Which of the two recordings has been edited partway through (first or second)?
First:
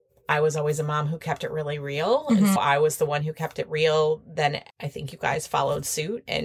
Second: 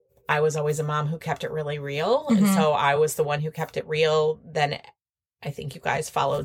first